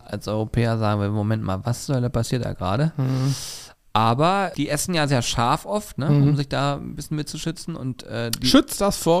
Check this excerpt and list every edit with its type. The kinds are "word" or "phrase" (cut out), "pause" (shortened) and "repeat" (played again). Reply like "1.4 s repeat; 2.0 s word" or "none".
4.5 s word; 5.1 s word